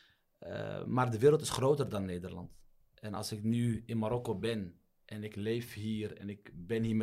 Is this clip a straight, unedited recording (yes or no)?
yes